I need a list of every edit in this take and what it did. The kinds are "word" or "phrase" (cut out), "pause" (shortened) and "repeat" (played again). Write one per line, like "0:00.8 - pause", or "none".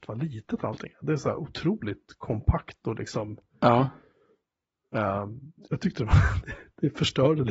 none